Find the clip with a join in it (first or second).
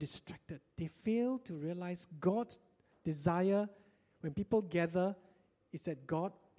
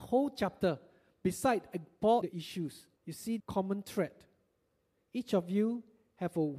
second